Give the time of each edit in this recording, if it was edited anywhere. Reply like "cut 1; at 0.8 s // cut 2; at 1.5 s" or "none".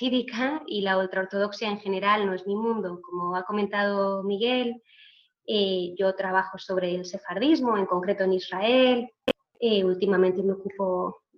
none